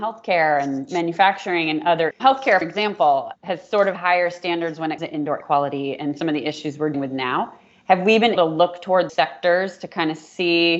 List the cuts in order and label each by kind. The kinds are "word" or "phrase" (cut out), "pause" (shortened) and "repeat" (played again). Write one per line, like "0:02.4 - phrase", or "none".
0:02.1 - word
0:02.6 - word
0:04.0 - word
0:05.0 - word
0:05.4 - word
0:06.9 - word
0:08.4 - word
0:09.1 - word